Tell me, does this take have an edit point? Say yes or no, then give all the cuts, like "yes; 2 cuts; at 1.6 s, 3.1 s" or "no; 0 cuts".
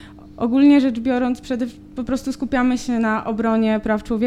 no; 0 cuts